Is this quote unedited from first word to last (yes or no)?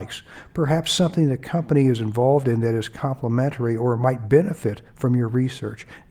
yes